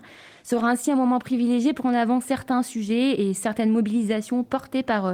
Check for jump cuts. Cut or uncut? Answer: cut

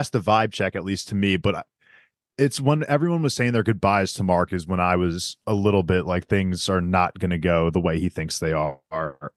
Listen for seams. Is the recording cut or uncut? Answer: uncut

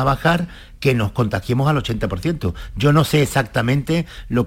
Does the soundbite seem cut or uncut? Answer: uncut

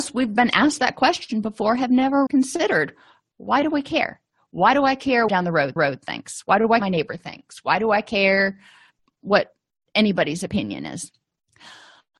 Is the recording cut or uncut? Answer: cut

